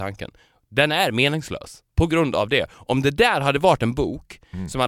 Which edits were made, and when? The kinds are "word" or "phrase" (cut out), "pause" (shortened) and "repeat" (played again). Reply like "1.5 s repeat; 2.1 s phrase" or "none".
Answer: 1.9 s pause

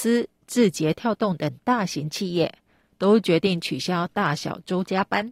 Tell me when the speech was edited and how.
none

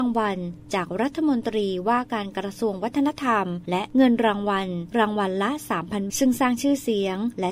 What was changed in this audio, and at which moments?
6.1 s phrase

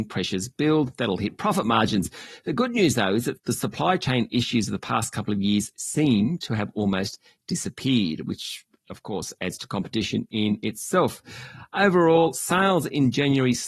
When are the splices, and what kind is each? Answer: none

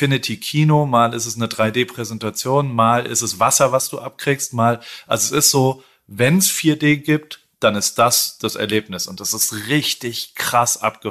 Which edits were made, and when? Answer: none

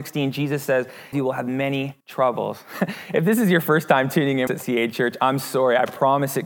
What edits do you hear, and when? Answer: 1.1 s phrase; 2.0 s pause; 4.5 s phrase

